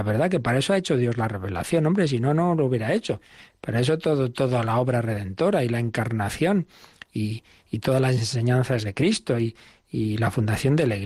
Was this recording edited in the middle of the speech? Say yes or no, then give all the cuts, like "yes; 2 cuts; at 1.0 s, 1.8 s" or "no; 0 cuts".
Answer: no; 0 cuts